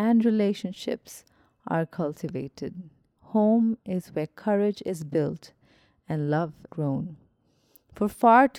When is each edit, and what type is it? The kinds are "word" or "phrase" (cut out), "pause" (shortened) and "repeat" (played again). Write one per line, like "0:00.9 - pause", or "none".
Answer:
0:06.7 - word